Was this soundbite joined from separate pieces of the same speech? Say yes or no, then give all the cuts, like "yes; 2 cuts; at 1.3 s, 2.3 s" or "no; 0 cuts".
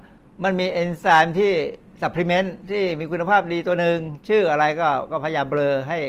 yes; 1 cut; at 2.6 s